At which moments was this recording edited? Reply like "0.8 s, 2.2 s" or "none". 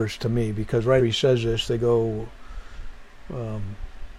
1.0 s